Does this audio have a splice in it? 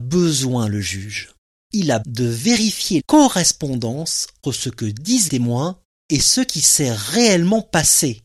yes; 4 cuts; at 2.0 s, 3.0 s, 4.4 s, 5.3 s

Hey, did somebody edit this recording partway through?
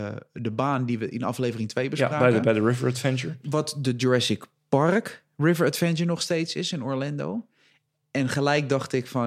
no; 0 cuts

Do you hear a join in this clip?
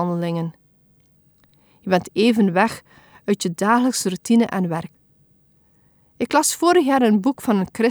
no; 0 cuts

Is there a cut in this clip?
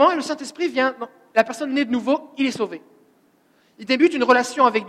no; 0 cuts

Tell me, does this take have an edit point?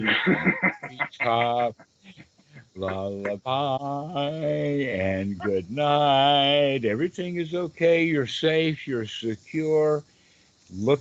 no; 0 cuts

